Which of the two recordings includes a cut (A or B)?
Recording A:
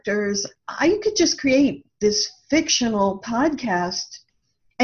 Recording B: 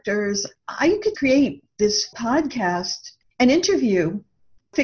B